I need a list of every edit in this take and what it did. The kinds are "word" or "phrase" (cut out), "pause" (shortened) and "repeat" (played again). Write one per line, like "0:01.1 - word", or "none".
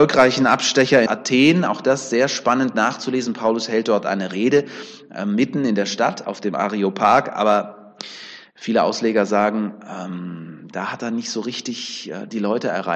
0:01.1 - phrase

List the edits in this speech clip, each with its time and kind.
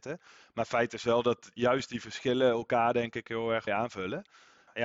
0:03.7 - word

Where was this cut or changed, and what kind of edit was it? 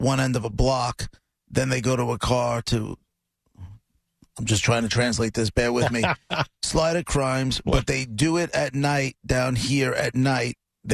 none

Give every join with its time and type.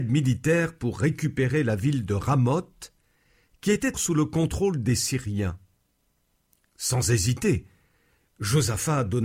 0:03.9 - word

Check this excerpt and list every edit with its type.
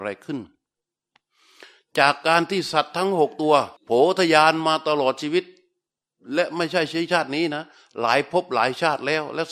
0:03.8 - pause

